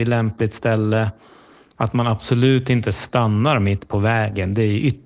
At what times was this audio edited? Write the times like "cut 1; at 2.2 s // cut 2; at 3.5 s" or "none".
none